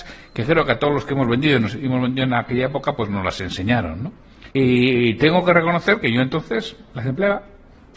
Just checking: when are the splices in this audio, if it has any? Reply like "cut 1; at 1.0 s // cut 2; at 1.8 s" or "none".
cut 1; at 4.5 s